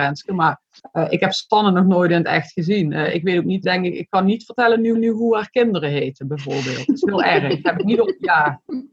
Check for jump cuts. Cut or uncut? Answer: cut